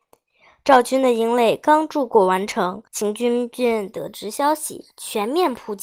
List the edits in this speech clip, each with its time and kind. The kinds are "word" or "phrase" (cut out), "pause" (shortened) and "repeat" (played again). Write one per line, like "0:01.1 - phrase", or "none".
0:02.9 - pause
0:04.9 - pause

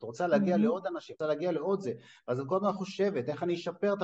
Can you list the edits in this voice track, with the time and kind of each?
0:01.2 - word

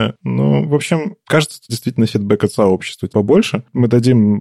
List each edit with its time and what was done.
0:01.7 - word
0:03.1 - word

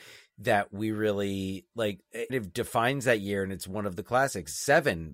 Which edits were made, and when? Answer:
0:02.3 - phrase

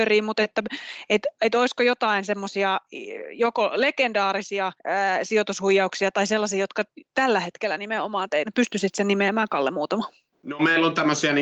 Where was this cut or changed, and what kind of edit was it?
0:04.8 - pause
0:08.4 - phrase

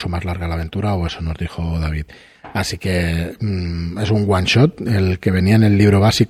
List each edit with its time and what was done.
none

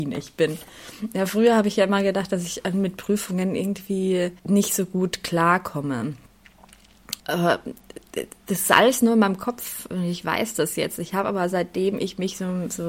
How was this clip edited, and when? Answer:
0:04.4 - pause
0:07.2 - pause

